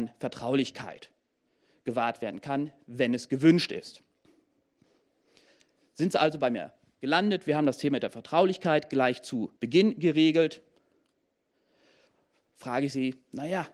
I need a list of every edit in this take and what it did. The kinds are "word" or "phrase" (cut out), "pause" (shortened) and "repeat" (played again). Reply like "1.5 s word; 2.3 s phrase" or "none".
9.6 s pause